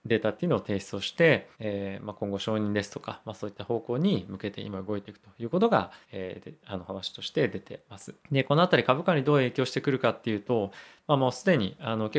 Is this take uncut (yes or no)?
no